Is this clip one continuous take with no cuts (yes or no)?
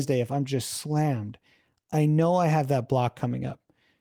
yes